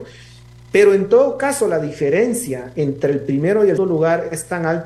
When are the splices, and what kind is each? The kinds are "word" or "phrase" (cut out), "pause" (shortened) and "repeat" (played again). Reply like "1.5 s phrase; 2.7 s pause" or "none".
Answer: 3.8 s word